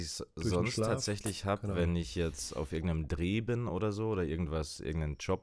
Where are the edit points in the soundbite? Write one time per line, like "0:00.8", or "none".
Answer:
none